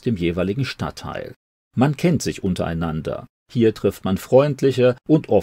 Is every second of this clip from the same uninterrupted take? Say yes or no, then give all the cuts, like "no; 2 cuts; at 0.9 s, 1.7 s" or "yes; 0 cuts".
yes; 0 cuts